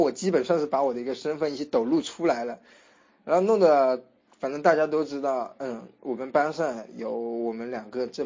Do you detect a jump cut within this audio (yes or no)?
no